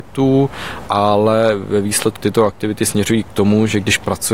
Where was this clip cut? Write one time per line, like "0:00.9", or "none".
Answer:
0:02.2

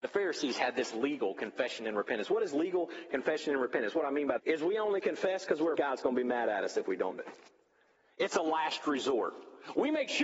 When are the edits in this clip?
0:04.4
0:05.7
0:07.2

